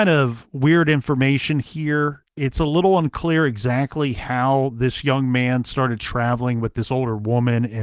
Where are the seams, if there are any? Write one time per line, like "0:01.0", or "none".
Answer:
none